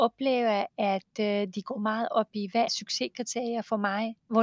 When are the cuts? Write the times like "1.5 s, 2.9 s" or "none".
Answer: 2.7 s